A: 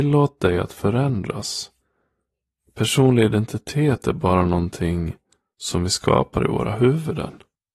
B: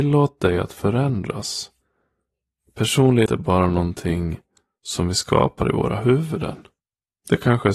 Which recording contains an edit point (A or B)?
B